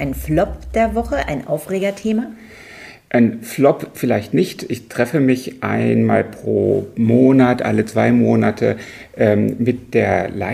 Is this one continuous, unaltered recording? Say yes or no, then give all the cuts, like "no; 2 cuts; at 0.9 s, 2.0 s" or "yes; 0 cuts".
yes; 0 cuts